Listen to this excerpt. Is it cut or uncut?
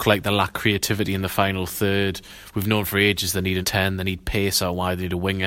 cut